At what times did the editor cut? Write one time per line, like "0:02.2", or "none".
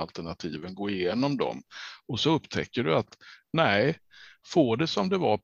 none